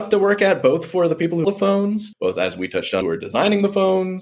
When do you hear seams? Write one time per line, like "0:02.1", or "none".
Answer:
0:01.4
0:02.1
0:03.0